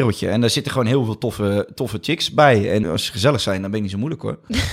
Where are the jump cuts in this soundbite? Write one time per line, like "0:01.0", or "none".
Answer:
0:02.8